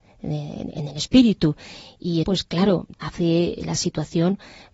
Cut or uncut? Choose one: cut